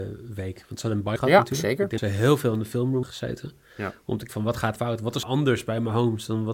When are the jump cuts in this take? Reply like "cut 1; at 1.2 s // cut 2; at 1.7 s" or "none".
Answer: cut 1; at 1.2 s // cut 2; at 2.0 s // cut 3; at 3.0 s // cut 4; at 4.3 s // cut 5; at 4.8 s // cut 6; at 5.2 s